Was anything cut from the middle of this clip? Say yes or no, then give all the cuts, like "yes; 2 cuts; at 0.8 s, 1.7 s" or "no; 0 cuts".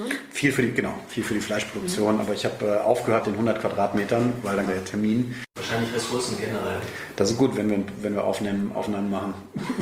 yes; 2 cuts; at 3.2 s, 4.7 s